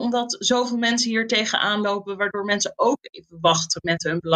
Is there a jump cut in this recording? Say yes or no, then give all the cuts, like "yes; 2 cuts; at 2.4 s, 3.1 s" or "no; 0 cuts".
no; 0 cuts